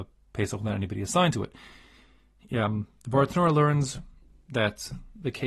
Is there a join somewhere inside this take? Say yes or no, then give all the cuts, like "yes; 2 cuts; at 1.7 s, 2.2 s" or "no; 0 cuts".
no; 0 cuts